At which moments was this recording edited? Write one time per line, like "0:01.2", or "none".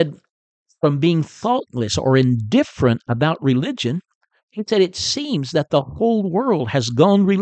none